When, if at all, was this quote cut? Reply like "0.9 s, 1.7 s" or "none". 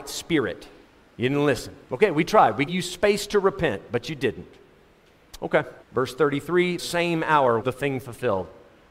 1.0 s, 1.8 s, 2.7 s, 5.8 s, 6.8 s, 7.6 s